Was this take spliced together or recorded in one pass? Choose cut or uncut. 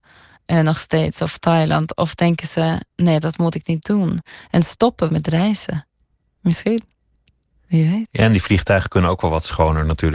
cut